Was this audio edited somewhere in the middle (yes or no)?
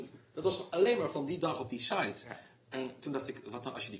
no